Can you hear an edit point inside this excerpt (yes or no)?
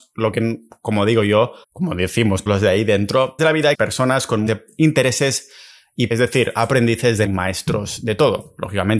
yes